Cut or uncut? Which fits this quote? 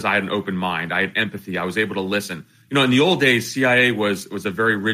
uncut